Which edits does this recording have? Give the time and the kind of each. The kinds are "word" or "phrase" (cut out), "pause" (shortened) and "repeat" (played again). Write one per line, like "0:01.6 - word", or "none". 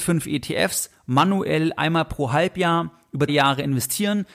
0:03.3 - word